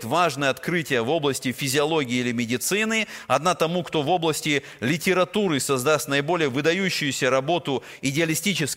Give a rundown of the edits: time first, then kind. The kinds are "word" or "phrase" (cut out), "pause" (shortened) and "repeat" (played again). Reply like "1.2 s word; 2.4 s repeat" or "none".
none